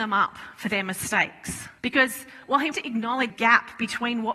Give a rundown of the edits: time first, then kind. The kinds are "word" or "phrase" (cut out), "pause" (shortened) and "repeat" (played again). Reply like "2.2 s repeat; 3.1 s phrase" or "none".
1.8 s pause; 2.7 s word; 3.3 s word